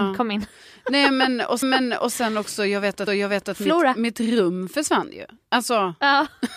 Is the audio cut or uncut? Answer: cut